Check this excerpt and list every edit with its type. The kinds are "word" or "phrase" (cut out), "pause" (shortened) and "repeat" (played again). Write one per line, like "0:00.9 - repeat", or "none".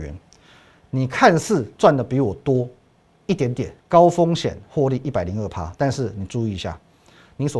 0:03.8 - pause